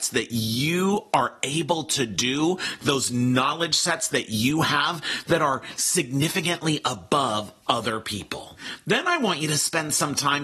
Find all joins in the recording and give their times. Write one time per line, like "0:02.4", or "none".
none